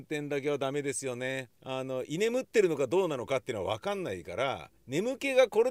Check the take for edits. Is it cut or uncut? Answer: cut